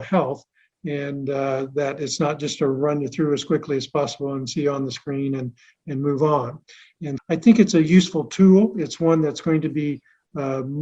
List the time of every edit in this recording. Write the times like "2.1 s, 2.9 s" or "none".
7.2 s